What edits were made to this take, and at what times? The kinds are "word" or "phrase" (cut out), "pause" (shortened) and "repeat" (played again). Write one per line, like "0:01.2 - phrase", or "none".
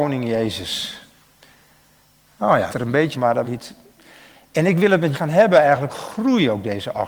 0:02.7 - word
0:03.1 - word
0:03.4 - word
0:05.1 - word
0:05.9 - word